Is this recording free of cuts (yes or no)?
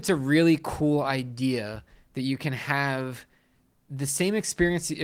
yes